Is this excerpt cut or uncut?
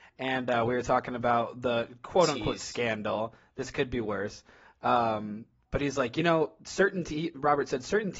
uncut